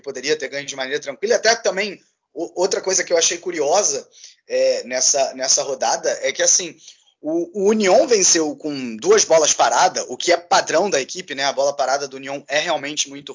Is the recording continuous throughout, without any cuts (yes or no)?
yes